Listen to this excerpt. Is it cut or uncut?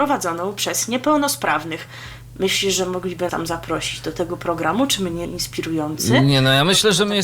cut